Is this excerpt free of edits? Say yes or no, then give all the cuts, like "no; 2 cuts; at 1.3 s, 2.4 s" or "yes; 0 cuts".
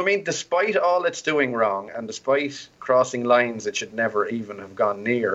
yes; 0 cuts